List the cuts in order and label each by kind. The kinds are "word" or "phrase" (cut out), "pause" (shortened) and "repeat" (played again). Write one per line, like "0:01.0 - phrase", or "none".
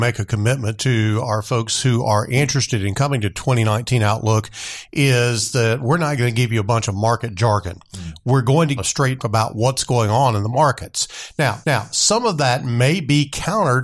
0:08.8 - phrase
0:09.2 - word
0:11.6 - repeat